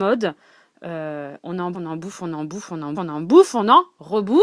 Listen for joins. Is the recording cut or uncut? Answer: cut